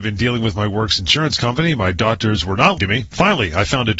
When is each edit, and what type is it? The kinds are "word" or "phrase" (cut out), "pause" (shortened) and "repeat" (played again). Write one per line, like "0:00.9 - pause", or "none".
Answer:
0:02.8 - word